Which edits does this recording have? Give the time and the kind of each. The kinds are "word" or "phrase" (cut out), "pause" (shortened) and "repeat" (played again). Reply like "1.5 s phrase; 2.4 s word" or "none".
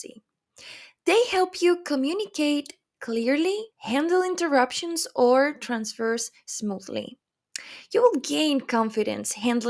3.7 s pause